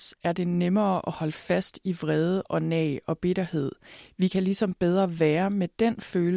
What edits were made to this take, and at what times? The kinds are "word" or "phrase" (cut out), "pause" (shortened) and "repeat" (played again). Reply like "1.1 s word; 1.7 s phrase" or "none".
none